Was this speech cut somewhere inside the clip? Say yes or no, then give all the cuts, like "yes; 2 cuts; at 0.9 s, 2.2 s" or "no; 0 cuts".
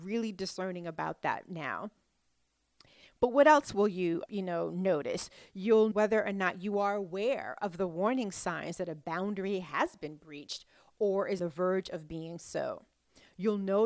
yes; 3 cuts; at 4.3 s, 5.9 s, 11.4 s